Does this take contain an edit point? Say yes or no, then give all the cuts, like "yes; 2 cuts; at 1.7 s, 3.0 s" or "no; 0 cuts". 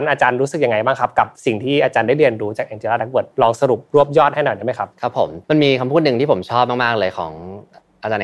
yes; 4 cuts; at 3.3 s, 3.9 s, 4.9 s, 5.4 s